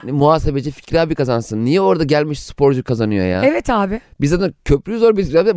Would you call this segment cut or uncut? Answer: uncut